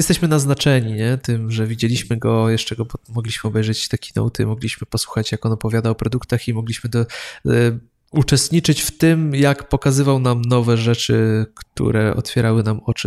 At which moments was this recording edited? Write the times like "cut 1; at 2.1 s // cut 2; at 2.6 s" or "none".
none